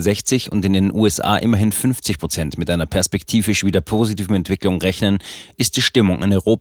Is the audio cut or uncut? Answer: uncut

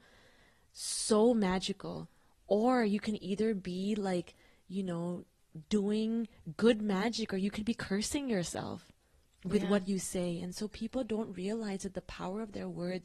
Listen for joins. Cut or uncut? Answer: uncut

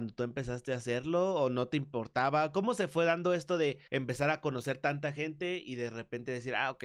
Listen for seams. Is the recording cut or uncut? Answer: cut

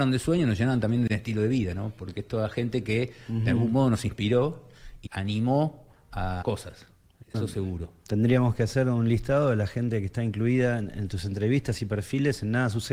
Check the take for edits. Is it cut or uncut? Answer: cut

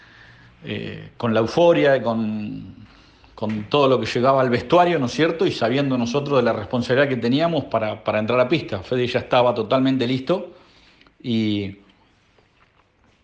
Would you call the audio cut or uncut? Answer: uncut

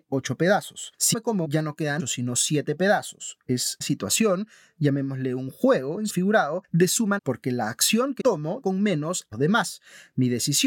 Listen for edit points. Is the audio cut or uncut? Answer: cut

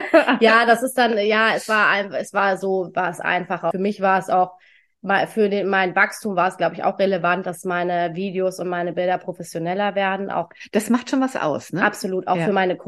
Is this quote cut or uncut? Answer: cut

